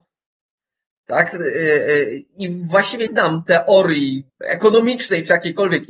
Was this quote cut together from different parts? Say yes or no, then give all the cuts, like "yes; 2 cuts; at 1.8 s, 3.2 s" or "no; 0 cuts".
yes; 2 cuts; at 3.1 s, 4.3 s